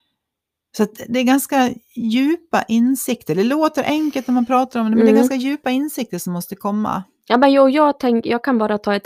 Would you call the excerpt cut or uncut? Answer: uncut